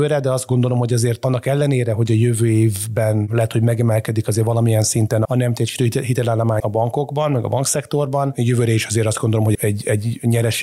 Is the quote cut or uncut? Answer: cut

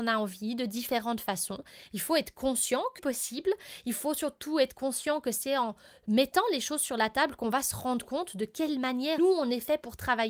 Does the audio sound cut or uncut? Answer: cut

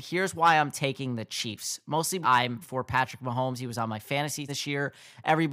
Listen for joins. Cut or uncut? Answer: cut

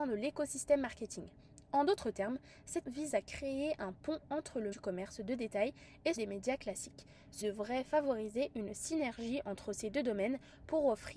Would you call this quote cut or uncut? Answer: cut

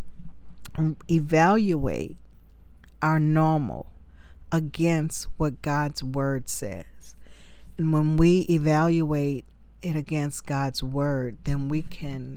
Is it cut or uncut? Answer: uncut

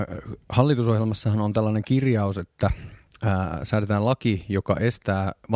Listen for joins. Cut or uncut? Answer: uncut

